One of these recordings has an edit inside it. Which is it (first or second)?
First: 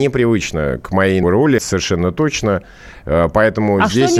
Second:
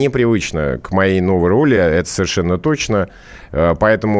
first